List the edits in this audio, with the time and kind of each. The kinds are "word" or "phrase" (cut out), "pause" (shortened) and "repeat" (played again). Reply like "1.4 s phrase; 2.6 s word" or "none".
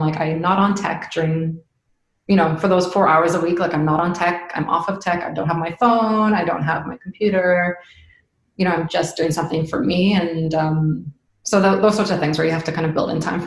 none